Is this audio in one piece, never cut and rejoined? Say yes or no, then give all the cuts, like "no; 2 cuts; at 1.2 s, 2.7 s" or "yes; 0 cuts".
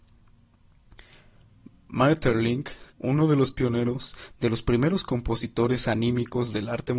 no; 1 cut; at 2.9 s